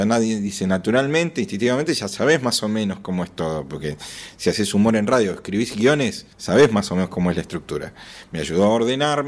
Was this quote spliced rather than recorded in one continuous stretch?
yes; 1 cut; at 6.3 s

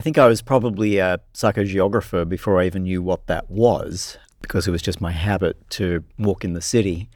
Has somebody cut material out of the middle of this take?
no; 0 cuts

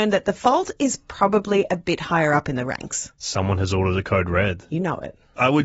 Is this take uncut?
yes; 0 cuts

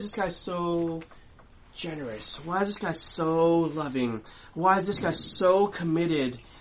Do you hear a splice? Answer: no; 0 cuts

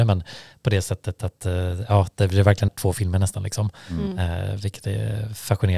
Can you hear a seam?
yes; 1 cut; at 2.7 s

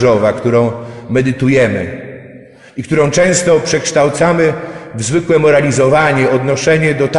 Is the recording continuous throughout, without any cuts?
yes; 0 cuts

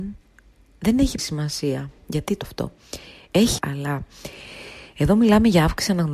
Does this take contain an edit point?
yes; 3 cuts; at 1.2 s, 2.4 s, 3.6 s

